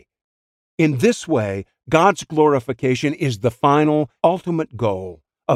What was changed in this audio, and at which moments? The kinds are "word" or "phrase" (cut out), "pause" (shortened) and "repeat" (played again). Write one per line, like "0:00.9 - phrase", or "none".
0:04.2 - word